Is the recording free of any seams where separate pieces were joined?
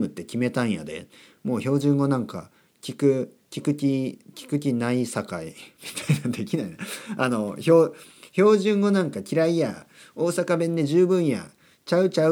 yes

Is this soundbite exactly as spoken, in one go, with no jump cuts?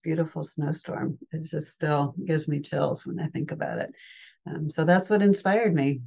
yes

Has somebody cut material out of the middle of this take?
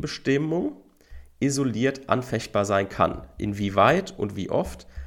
no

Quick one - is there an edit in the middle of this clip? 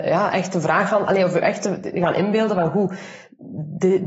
no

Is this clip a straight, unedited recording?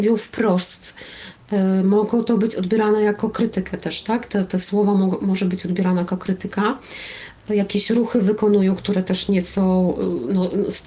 yes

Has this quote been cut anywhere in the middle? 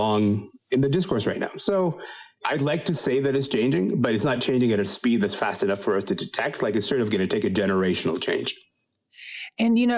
no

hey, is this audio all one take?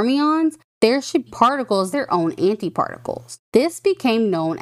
no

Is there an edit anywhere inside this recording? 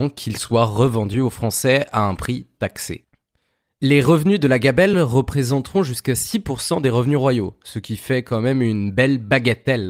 no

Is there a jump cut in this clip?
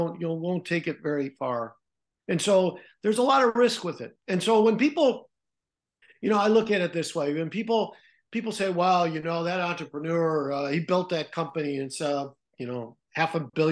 no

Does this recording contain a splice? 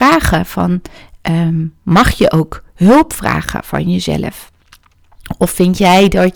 no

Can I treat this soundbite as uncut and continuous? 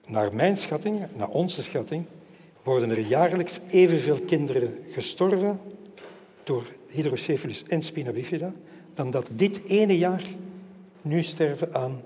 no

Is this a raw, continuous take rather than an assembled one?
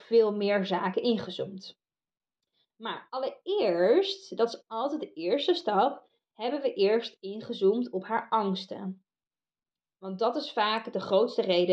yes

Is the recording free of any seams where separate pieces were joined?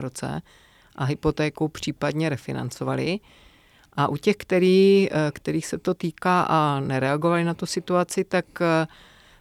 yes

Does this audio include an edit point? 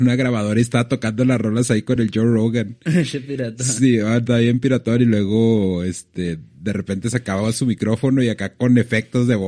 no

